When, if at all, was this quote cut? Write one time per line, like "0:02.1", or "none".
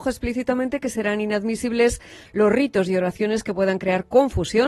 none